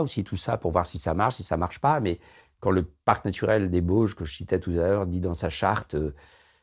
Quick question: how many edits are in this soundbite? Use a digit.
0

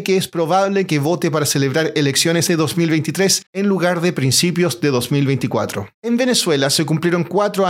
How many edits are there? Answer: 3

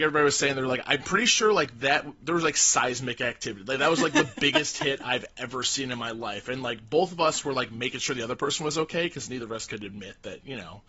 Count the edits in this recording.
0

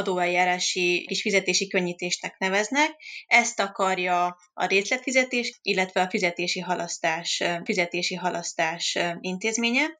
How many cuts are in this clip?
3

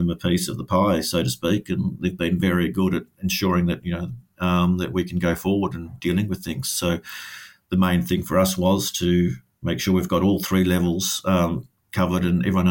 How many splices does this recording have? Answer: 0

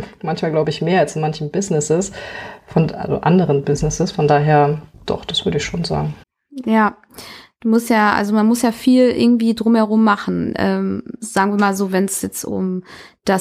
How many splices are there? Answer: 2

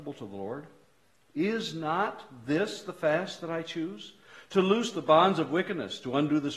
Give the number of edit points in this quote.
0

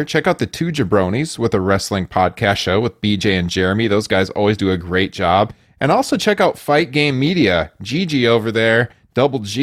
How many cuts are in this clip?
0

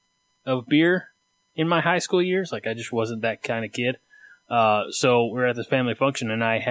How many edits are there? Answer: 0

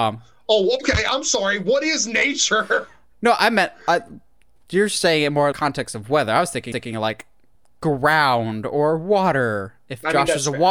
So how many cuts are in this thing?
2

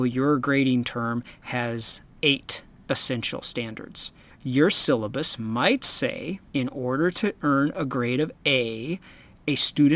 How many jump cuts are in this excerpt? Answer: 4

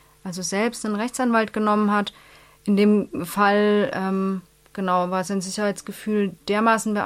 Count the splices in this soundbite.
0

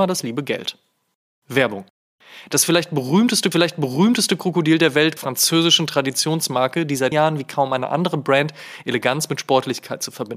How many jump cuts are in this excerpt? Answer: 3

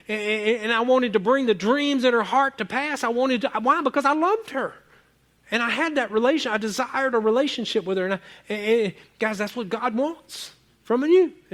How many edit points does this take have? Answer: 0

